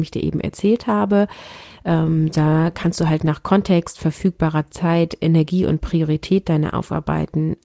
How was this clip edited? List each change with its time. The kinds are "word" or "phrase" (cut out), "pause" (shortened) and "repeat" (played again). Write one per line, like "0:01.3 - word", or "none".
none